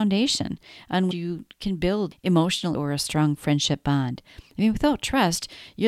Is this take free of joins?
no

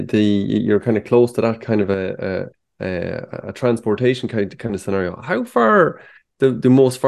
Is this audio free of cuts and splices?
no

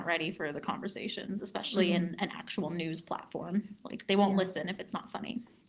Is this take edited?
no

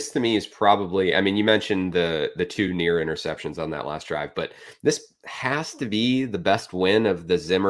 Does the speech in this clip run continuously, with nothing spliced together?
yes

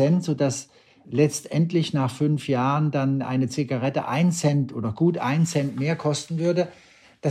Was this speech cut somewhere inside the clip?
no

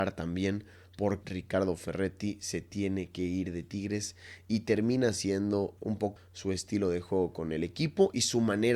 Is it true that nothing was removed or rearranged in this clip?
no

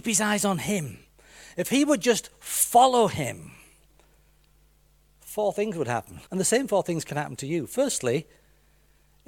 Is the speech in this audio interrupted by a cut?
yes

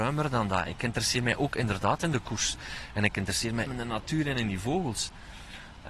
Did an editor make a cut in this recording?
yes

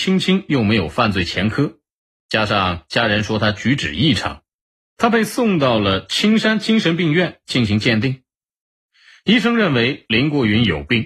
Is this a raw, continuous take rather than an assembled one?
yes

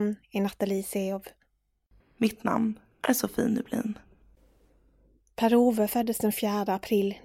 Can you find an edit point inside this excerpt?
no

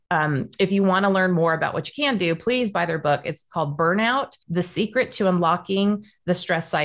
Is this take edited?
yes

